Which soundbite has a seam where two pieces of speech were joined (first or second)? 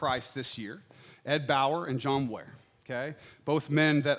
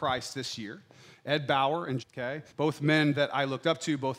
second